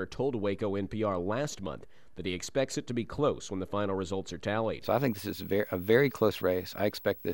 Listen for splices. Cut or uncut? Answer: uncut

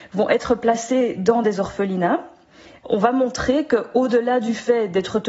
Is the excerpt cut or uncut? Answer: uncut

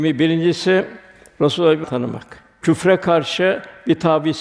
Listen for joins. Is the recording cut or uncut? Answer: cut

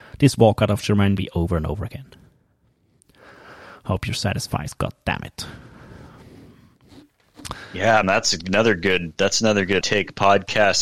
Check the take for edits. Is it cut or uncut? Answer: cut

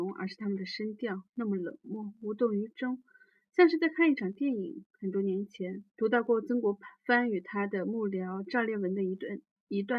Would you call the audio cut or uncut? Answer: cut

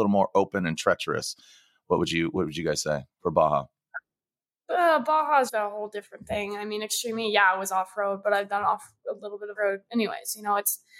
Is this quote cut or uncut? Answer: cut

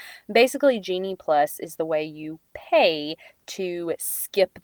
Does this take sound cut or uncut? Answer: uncut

